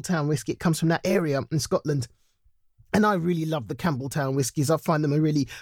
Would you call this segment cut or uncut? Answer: uncut